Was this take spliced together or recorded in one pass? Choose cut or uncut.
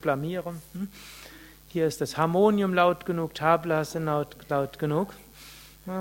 uncut